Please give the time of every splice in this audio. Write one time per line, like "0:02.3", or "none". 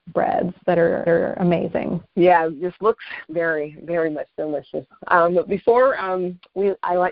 0:01.1
0:03.2